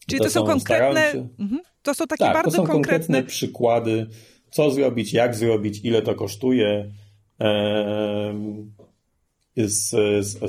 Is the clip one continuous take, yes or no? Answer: yes